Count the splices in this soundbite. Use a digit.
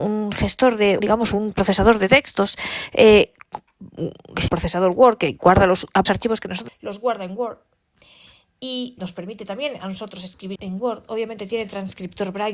6